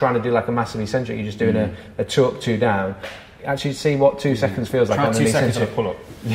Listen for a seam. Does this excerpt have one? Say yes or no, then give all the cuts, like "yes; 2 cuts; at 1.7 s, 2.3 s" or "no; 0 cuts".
no; 0 cuts